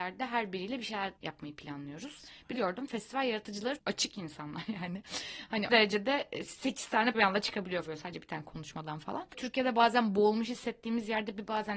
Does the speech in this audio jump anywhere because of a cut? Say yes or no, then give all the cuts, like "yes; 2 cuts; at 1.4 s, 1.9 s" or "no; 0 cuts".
yes; 6 cuts; at 1.2 s, 2.5 s, 3.8 s, 5.7 s, 7.1 s, 7.9 s